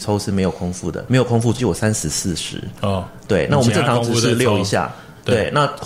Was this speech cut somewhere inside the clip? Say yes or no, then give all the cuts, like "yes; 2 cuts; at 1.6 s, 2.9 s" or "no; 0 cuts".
yes; 2 cuts; at 1.1 s, 1.6 s